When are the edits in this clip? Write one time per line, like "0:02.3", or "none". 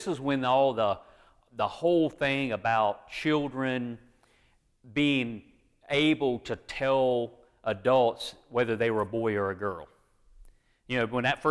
none